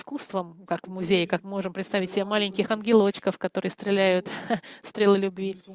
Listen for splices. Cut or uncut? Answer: cut